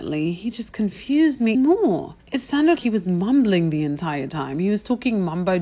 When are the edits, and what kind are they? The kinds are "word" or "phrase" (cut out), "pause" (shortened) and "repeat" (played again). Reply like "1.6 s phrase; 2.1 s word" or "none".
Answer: 1.5 s word; 2.2 s pause; 2.7 s word